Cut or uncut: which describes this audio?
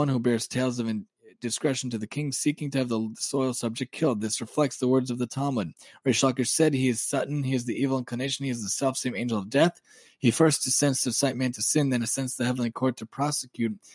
uncut